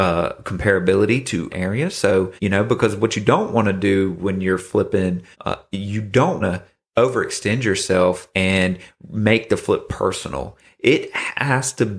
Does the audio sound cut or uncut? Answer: cut